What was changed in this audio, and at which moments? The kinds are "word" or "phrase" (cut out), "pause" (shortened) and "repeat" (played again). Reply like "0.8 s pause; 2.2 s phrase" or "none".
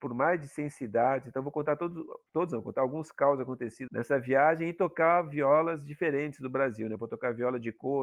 2.3 s pause; 3.9 s word